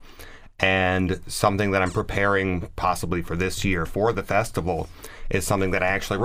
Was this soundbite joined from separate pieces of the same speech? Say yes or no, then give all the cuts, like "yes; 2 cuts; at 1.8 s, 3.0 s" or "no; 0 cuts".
no; 0 cuts